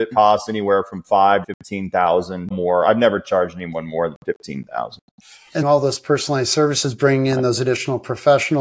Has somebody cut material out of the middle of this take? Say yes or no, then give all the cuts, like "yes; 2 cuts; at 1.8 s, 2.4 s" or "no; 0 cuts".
yes; 3 cuts; at 1.4 s, 2.5 s, 5.6 s